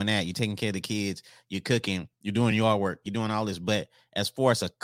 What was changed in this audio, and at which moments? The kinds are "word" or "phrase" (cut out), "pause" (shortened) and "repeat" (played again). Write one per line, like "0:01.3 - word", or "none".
none